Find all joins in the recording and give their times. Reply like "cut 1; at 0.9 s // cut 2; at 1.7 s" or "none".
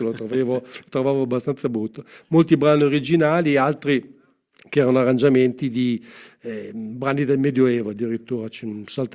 none